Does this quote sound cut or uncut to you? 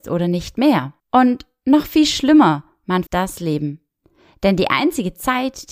cut